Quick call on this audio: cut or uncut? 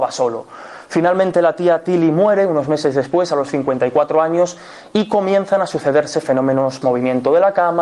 cut